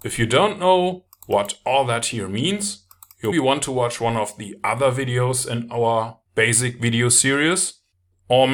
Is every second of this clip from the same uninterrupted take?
no; 2 cuts; at 3.3 s, 6.3 s

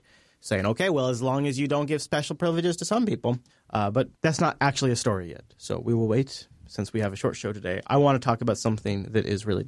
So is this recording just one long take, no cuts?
no; 2 cuts; at 3.5 s, 4.1 s

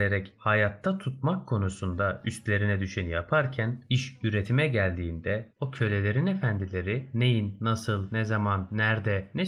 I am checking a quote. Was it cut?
no; 0 cuts

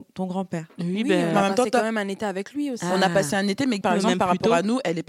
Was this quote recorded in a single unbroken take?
no; 1 cut; at 3.8 s

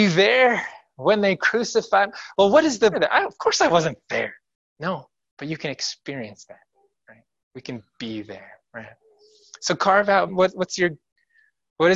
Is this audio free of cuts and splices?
no; 2 cuts; at 2.9 s, 10.3 s

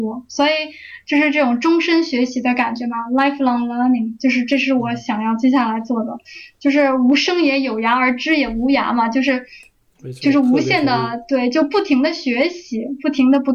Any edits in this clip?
no; 0 cuts

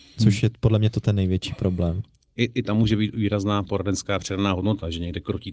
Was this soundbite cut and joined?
no; 0 cuts

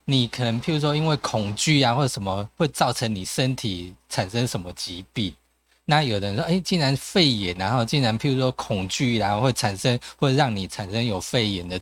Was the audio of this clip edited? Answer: no; 0 cuts

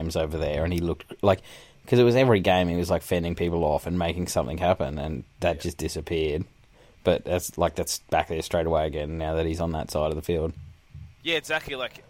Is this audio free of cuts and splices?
yes; 0 cuts

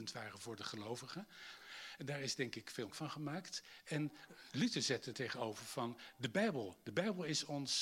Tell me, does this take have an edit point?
yes; 2 cuts; at 2.9 s, 5.1 s

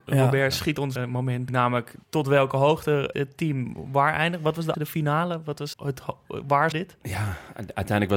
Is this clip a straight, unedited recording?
no; 7 cuts; at 1.0 s, 1.5 s, 2.0 s, 3.1 s, 4.7 s, 5.7 s, 6.7 s

